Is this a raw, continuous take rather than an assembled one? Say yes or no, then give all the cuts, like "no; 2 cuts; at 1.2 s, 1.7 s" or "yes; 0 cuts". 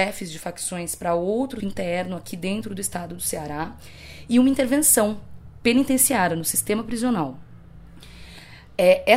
no; 1 cut; at 1.6 s